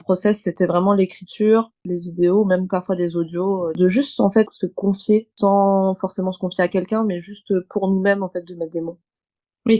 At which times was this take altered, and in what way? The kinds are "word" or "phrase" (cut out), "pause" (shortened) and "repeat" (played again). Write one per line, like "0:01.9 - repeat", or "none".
0:01.8 - pause
0:05.3 - pause